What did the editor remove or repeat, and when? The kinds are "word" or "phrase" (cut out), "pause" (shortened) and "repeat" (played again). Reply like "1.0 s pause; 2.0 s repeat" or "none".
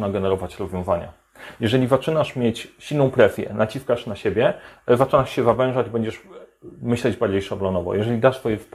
none